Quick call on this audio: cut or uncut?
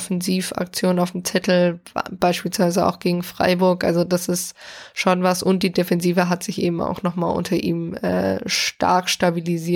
uncut